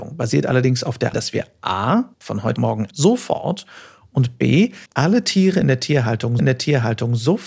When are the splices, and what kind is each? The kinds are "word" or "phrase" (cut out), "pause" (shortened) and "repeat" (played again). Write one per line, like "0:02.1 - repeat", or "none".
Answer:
0:01.1 - word
0:02.1 - pause
0:02.6 - word
0:02.9 - phrase
0:04.9 - pause
0:06.4 - repeat

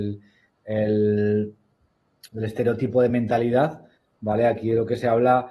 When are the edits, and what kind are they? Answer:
none

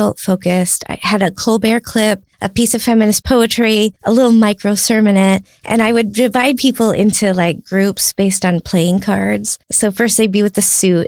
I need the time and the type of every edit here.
0:02.3 - pause
0:04.0 - pause
0:09.6 - pause

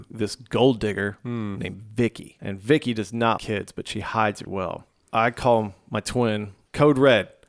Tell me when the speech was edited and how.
0:03.4 - word
0:04.5 - word

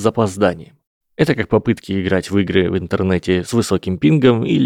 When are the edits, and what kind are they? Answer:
none

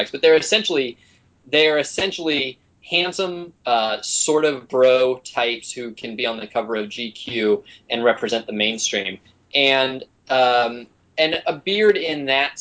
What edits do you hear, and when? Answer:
0:03.6 - pause

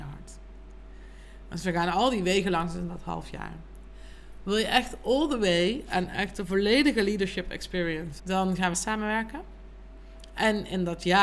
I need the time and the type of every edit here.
0:08.2 - word
0:08.7 - phrase

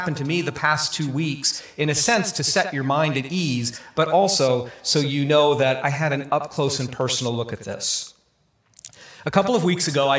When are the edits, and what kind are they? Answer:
none

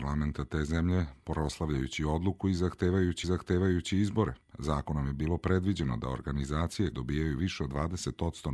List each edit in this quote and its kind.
0:03.2 - repeat
0:06.9 - word

